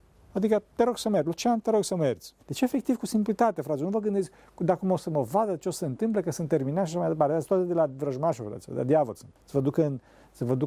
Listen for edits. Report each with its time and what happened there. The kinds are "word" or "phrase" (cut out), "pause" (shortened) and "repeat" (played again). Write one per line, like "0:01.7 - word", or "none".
0:02.4 - pause
0:09.4 - pause